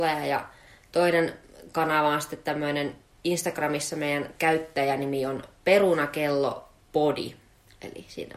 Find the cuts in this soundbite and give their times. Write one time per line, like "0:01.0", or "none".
none